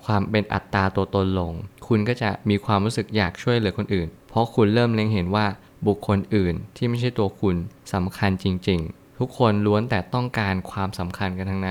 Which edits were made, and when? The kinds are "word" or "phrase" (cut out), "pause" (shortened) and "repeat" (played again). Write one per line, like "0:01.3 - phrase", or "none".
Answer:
none